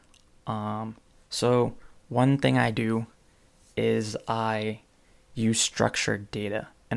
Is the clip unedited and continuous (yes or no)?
yes